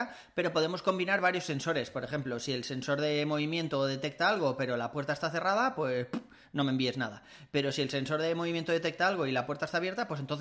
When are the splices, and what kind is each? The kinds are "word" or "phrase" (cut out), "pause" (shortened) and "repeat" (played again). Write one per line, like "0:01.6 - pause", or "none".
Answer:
none